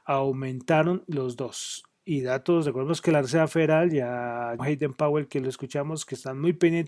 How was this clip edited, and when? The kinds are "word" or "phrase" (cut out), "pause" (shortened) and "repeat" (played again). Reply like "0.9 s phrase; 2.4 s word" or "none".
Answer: 4.6 s word